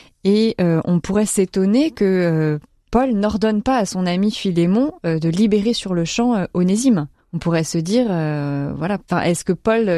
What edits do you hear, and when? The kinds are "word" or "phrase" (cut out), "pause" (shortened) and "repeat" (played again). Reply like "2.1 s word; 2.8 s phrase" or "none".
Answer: 7.2 s pause